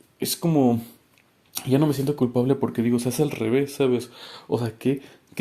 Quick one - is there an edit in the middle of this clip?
no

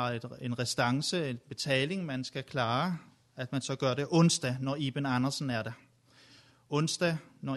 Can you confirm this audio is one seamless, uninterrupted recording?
yes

